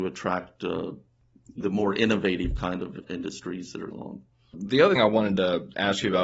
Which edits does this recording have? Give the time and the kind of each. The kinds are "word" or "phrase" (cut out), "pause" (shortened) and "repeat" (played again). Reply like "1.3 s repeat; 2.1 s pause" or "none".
1.6 s word; 3.0 s word; 3.9 s word; 5.0 s word